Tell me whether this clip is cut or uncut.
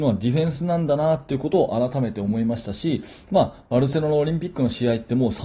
uncut